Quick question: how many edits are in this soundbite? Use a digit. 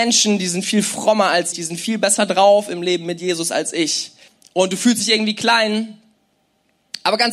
2